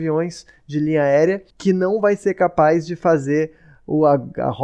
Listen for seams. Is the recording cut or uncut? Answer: cut